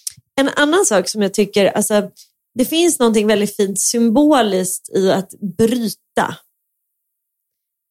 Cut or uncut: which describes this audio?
uncut